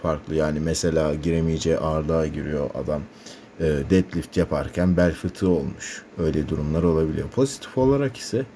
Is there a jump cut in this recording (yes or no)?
yes